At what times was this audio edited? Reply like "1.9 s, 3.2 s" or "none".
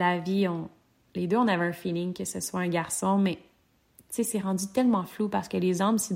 none